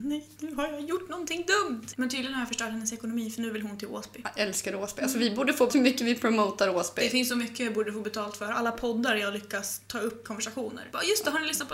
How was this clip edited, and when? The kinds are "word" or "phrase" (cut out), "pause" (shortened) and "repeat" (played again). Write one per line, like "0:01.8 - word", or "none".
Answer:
0:05.7 - word
0:10.2 - word